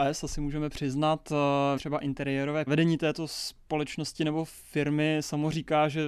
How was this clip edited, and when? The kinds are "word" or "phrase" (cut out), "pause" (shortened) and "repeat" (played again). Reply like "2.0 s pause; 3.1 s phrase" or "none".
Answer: 1.8 s word; 2.7 s phrase